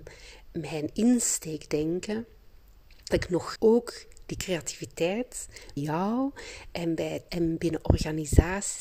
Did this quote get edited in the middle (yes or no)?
yes